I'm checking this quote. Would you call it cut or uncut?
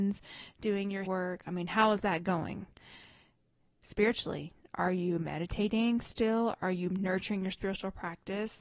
cut